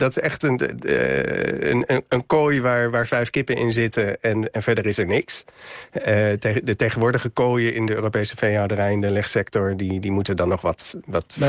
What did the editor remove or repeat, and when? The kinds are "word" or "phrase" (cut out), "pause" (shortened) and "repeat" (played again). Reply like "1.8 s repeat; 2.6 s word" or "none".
none